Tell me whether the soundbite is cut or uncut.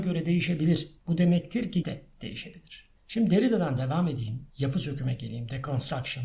cut